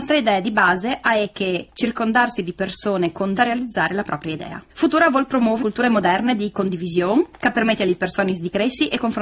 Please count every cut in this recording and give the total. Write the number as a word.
three